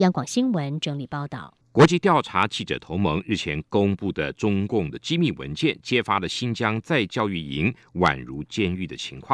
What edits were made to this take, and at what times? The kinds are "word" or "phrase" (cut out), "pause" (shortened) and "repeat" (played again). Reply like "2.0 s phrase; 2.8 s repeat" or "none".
1.6 s pause